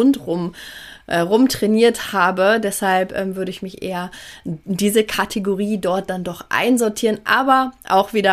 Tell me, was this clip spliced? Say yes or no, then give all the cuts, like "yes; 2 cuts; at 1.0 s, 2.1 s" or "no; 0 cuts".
no; 0 cuts